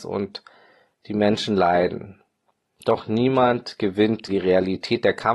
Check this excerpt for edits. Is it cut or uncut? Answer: cut